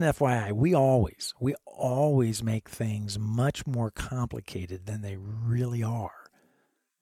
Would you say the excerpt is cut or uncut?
uncut